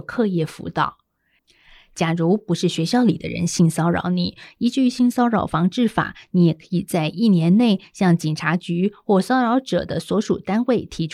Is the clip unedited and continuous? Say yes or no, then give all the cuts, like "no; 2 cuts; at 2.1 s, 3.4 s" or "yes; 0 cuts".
yes; 0 cuts